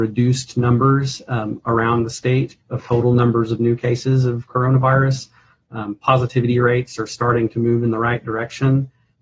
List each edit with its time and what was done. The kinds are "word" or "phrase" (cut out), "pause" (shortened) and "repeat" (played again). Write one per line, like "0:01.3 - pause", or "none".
0:02.6 - pause